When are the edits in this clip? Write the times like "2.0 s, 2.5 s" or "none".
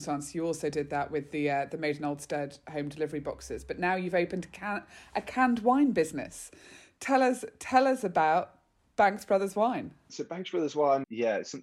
none